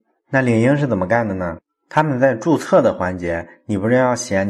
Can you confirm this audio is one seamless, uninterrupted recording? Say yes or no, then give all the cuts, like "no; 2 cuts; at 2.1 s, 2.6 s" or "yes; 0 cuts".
yes; 0 cuts